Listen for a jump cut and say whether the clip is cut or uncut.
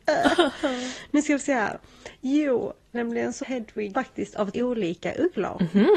cut